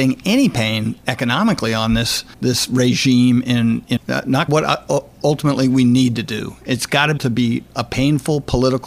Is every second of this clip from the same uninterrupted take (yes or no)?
no